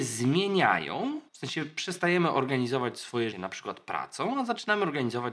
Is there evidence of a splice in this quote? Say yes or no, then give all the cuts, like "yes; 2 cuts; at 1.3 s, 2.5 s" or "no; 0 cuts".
yes; 2 cuts; at 1.3 s, 3.3 s